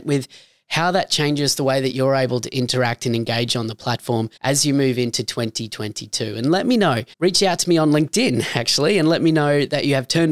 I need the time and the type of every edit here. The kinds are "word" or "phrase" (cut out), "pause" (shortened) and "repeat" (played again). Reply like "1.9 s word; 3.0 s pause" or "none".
4.4 s pause; 7.1 s pause

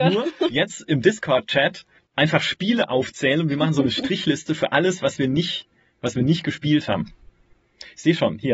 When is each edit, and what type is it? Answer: 2.0 s pause

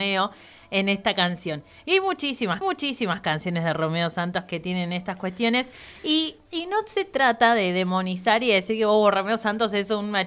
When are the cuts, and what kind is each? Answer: 2.6 s repeat

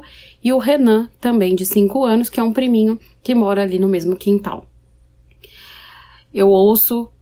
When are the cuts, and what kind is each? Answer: none

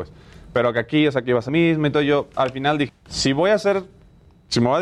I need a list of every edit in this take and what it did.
1.5 s word; 2.3 s word; 2.9 s word

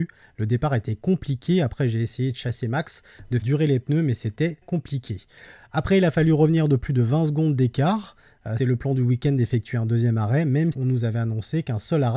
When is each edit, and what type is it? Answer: 3.4 s word; 4.6 s word; 8.6 s word; 10.7 s word

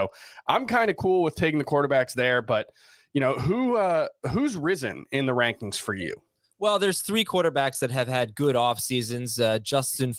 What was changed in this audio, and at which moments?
none

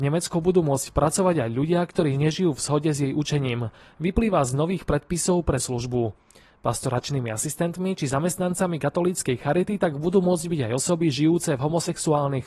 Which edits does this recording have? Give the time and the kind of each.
5.6 s word

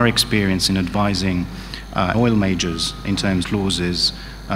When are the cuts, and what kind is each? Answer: 2.1 s word; 3.4 s phrase

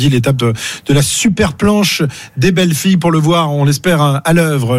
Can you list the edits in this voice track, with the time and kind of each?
none

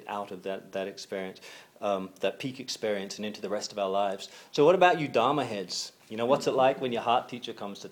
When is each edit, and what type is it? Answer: 6.0 s pause

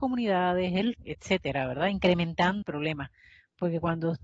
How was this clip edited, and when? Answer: 0.9 s word; 2.6 s word

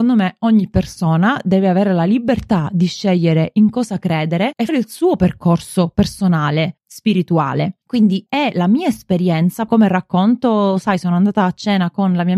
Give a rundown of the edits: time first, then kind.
4.7 s word; 8.3 s phrase; 9.7 s word

